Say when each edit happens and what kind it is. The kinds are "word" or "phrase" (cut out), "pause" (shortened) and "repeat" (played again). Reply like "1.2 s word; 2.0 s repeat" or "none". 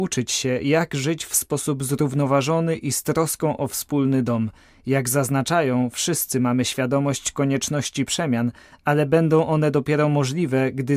none